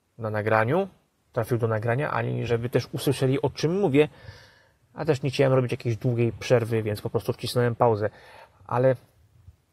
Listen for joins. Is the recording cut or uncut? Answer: uncut